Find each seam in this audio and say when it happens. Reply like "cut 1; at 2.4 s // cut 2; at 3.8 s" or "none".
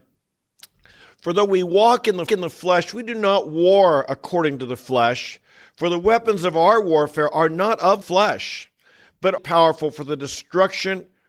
cut 1; at 2.3 s // cut 2; at 8.0 s // cut 3; at 9.4 s